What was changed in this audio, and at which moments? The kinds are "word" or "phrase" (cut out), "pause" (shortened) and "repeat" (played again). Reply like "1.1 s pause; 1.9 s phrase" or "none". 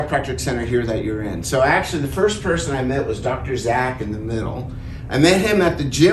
none